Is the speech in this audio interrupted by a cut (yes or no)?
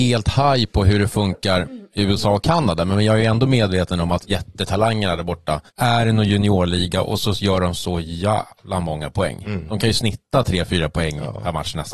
yes